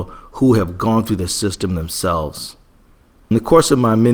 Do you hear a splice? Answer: no; 0 cuts

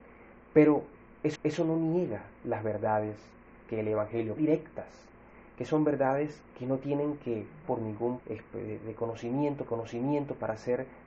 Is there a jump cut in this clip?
yes; 7 cuts; at 1.4 s, 3.6 s, 4.4 s, 6.5 s, 7.6 s, 8.2 s, 9.7 s

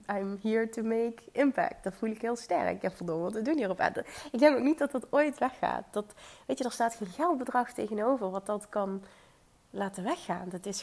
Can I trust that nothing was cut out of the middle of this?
yes; 0 cuts

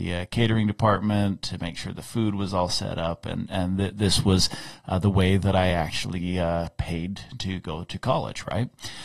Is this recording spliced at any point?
no; 0 cuts

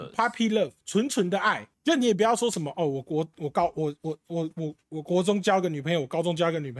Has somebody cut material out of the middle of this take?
yes; 2 cuts; at 1.7 s, 4.8 s

